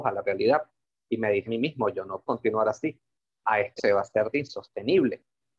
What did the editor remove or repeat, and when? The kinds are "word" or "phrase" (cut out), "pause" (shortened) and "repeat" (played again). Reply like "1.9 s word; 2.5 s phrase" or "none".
1.5 s word; 2.3 s word; 3.8 s word; 4.3 s word